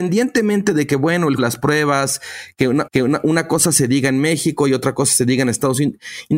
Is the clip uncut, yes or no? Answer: no